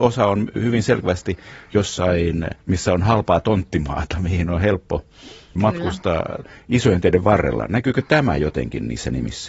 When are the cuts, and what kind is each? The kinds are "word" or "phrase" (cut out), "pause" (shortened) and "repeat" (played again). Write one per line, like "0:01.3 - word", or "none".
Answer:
0:02.6 - pause